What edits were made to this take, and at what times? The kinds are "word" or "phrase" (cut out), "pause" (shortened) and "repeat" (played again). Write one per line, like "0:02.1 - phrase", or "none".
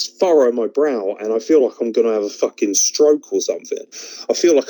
none